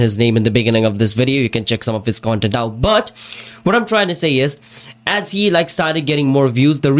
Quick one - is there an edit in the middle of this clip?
no; 0 cuts

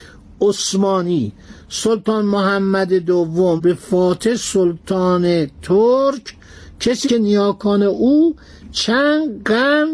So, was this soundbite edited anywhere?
yes; 2 cuts; at 3.6 s, 7.0 s

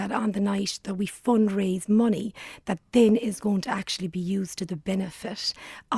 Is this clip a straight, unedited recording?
yes; 0 cuts

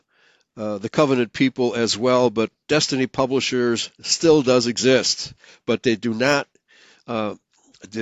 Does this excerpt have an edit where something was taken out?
no; 0 cuts

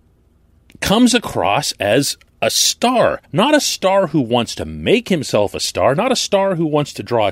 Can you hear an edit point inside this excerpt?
yes; 2 cuts; at 2.3 s, 3.2 s

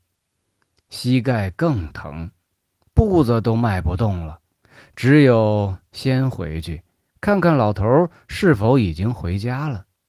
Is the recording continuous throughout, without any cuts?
yes; 0 cuts

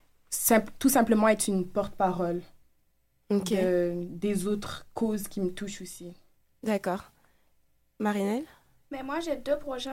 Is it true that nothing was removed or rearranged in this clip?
yes; 0 cuts

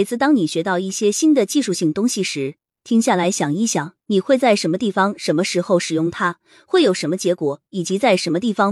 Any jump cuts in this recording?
no; 0 cuts

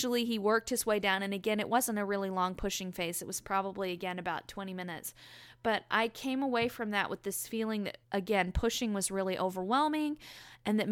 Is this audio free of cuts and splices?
no; 1 cut; at 8.0 s

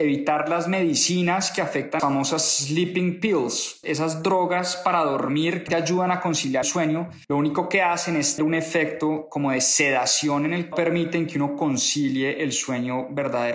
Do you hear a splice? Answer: yes; 7 cuts; at 2.0 s, 3.8 s, 5.7 s, 6.6 s, 7.2 s, 8.4 s, 10.7 s

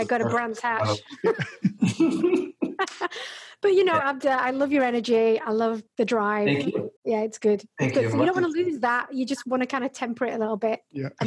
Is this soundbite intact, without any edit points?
no; 2 cuts; at 5.9 s, 7.0 s

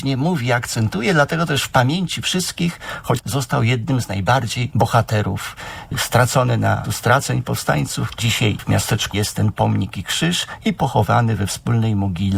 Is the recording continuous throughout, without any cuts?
no; 5 cuts; at 3.2 s, 4.7 s, 6.8 s, 8.2 s, 9.1 s

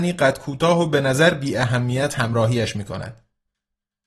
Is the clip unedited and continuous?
yes; 0 cuts

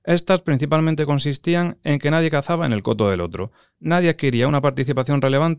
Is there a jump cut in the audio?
no; 0 cuts

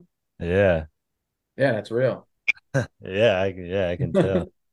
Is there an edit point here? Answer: no; 0 cuts

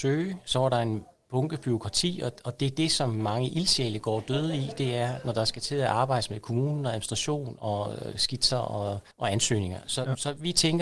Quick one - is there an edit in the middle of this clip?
yes; 1 cut; at 9.1 s

